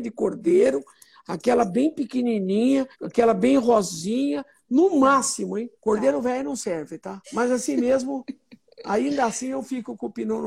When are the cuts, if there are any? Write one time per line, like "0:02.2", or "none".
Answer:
0:02.9
0:05.7
0:07.2